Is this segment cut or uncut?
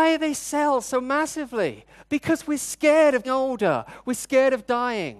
cut